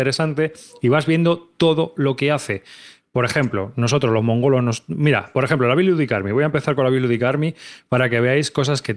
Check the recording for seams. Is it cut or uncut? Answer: uncut